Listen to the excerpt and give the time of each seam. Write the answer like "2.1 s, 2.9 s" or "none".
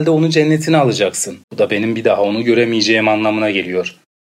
1.4 s